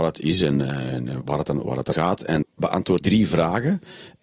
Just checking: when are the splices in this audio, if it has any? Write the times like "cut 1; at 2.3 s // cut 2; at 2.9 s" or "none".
cut 1; at 1.2 s // cut 2; at 1.9 s // cut 3; at 2.4 s // cut 4; at 3.0 s